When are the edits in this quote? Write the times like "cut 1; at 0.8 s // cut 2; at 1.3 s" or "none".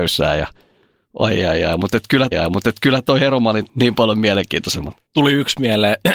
cut 1; at 2.3 s // cut 2; at 3.7 s // cut 3; at 5.1 s